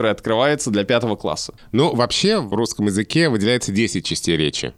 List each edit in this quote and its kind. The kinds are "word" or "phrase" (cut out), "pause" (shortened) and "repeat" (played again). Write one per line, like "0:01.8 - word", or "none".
0:02.5 - word